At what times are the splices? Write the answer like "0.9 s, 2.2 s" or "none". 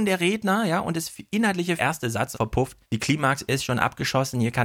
1.8 s, 2.3 s, 2.8 s